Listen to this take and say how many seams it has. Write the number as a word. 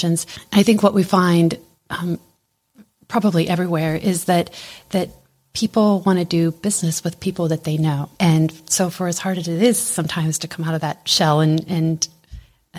one